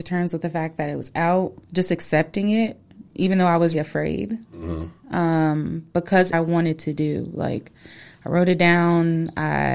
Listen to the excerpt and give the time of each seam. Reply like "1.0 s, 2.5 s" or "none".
1.6 s, 3.7 s, 6.3 s